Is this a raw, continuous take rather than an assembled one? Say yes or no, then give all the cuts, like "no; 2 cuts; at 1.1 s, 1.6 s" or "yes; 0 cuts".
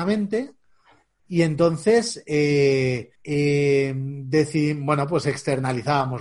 no; 1 cut; at 3.2 s